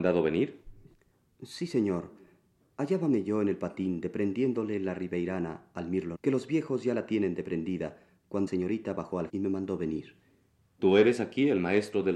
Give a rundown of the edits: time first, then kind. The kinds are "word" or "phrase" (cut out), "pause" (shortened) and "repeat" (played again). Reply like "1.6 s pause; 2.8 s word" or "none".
6.1 s word; 8.5 s word; 9.3 s word